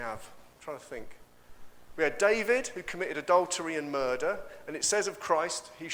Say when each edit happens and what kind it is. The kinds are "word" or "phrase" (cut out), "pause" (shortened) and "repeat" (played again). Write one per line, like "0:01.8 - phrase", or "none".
none